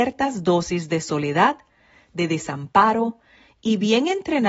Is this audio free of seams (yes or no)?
yes